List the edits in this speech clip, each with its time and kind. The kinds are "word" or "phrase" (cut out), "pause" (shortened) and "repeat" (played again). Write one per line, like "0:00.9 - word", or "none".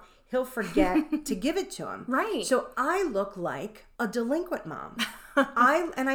0:03.9 - pause